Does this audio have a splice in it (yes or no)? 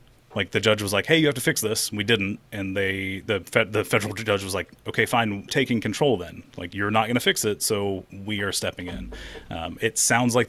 yes